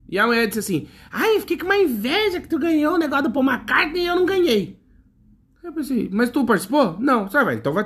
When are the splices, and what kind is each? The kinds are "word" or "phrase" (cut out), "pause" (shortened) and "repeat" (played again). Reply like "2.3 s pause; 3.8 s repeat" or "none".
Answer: none